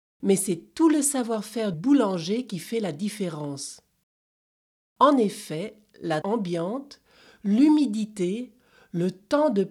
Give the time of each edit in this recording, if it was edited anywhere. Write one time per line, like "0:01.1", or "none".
0:01.7
0:06.2